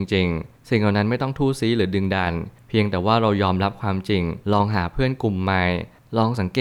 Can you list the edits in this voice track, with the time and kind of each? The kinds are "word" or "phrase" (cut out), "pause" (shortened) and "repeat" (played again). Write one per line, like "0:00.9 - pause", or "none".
0:04.4 - pause